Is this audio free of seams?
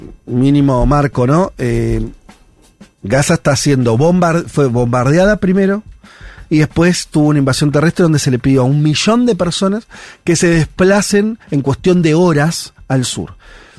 no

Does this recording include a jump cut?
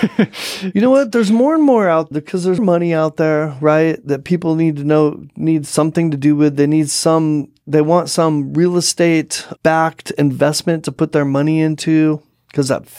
yes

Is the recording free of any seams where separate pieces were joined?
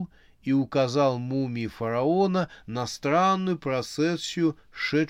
yes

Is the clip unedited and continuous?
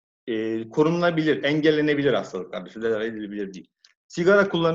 yes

